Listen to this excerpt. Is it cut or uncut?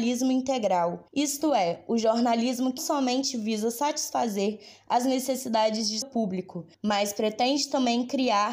cut